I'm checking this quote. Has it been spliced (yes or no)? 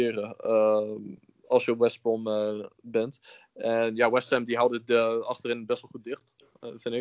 no